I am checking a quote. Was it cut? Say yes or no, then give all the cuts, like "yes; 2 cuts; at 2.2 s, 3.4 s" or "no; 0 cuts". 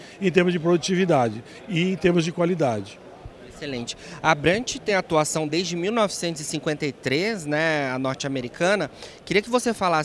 no; 0 cuts